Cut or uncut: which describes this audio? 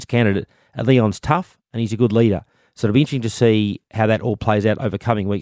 uncut